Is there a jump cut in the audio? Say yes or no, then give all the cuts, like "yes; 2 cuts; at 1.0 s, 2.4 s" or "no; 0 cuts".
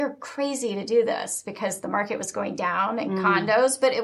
no; 0 cuts